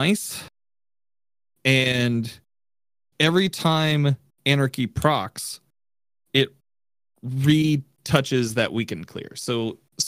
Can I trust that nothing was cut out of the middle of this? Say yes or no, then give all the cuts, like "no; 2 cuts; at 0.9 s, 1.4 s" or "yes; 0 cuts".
yes; 0 cuts